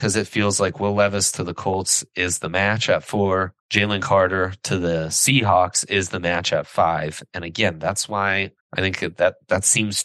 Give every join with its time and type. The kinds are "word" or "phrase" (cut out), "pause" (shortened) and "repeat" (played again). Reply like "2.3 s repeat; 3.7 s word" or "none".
3.6 s pause; 8.6 s pause